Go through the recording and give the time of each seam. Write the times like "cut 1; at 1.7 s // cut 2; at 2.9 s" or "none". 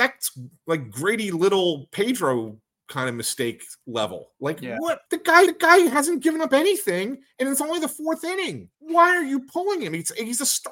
cut 1; at 5.1 s // cut 2; at 5.5 s // cut 3; at 8.7 s